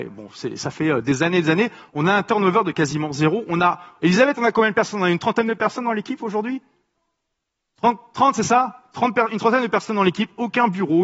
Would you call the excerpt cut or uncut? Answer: uncut